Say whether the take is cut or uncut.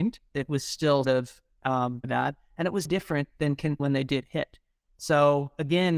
cut